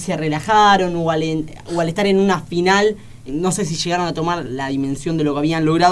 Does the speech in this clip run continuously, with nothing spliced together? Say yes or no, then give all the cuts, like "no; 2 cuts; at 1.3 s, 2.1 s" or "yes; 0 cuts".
no; 1 cut; at 3.3 s